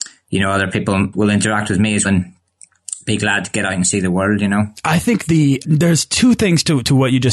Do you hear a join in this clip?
yes; 3 cuts; at 1.1 s, 2.0 s, 5.6 s

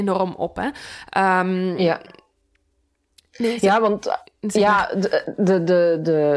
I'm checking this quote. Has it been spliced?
no; 0 cuts

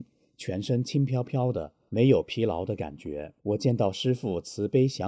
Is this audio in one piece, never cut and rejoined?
no; 1 cut; at 3.4 s

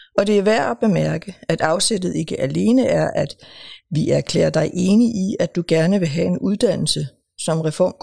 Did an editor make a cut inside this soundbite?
no; 0 cuts

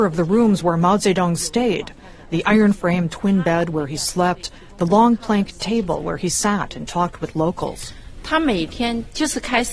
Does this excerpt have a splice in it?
no; 0 cuts

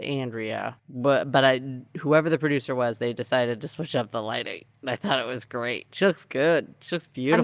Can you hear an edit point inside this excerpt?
no; 0 cuts

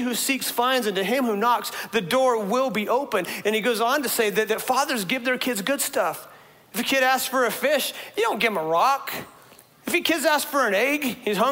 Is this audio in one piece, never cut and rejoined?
yes; 0 cuts

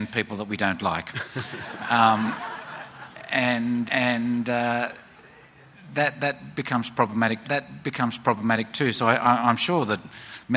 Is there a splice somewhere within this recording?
yes; 2 cuts; at 3.9 s, 7.4 s

